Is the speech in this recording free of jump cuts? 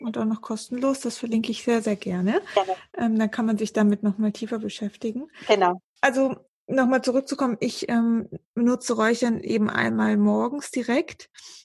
no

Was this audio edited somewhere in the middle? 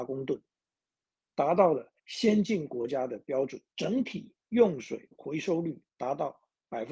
yes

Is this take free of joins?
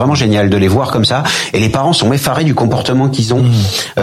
yes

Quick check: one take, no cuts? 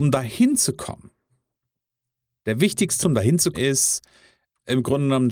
no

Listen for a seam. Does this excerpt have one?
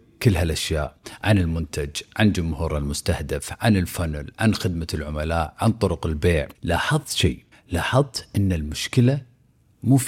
yes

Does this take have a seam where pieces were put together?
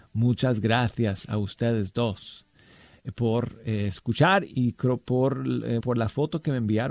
yes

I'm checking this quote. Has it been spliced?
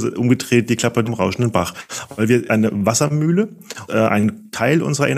yes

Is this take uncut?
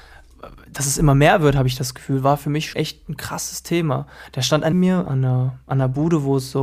no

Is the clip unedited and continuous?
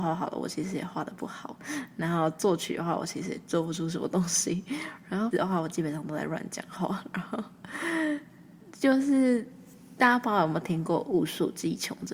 no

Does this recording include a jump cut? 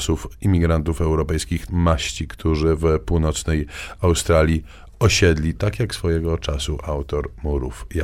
yes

